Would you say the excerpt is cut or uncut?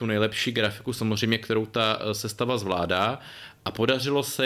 uncut